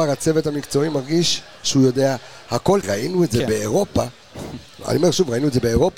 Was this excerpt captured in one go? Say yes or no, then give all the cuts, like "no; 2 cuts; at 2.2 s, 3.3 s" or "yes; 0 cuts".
no; 1 cut; at 2.8 s